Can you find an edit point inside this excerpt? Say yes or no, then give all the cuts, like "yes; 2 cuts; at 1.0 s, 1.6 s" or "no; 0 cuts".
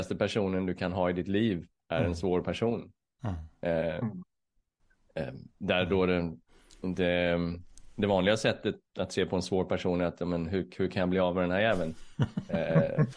yes; 1 cut; at 8.9 s